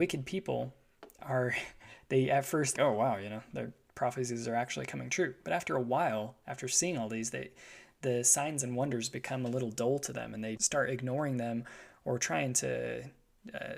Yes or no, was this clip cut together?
yes